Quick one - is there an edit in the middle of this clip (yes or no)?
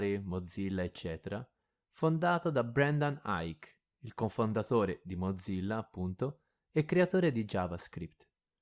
no